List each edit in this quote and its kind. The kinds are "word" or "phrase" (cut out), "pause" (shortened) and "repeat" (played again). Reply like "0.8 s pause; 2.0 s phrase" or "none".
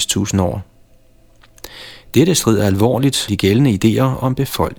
3.3 s word